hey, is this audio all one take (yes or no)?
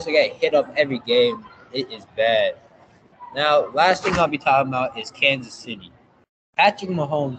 yes